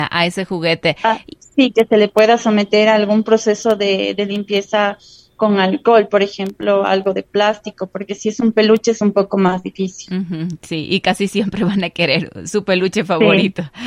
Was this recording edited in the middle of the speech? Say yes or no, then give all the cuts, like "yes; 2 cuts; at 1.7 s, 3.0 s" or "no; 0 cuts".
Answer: no; 0 cuts